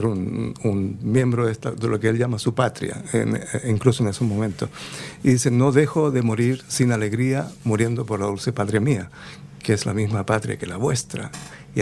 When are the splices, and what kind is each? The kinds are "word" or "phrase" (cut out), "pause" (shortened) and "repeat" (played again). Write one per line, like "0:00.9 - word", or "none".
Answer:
none